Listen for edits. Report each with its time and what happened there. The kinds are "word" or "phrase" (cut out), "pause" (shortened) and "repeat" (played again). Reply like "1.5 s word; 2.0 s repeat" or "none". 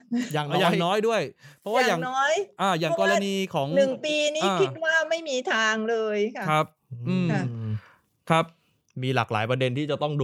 none